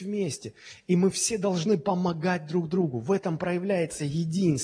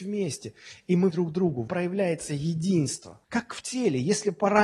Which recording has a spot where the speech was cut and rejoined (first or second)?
second